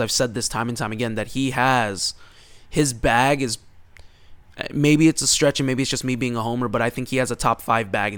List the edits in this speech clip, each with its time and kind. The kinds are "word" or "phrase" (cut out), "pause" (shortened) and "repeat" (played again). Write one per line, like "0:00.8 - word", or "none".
none